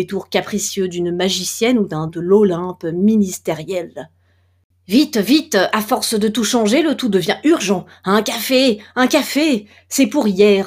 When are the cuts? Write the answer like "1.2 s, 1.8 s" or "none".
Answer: 2.1 s